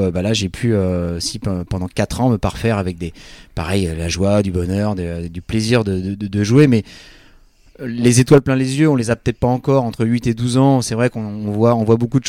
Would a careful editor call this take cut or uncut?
uncut